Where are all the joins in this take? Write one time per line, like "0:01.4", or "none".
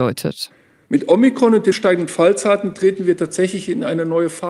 0:01.7